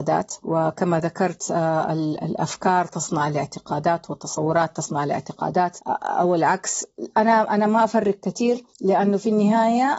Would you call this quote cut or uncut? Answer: cut